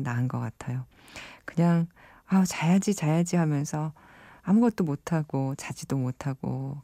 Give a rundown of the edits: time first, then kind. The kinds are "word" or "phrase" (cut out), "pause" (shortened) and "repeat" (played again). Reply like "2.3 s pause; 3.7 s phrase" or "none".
none